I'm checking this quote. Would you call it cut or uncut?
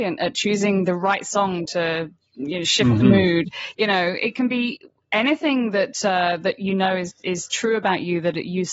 uncut